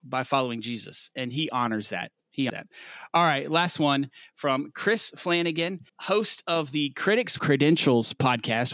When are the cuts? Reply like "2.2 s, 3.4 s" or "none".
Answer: 2.5 s, 5.9 s, 7.4 s